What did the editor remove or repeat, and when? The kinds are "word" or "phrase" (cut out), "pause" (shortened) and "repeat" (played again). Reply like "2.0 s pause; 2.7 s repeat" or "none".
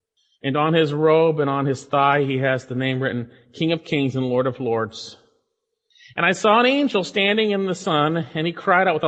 none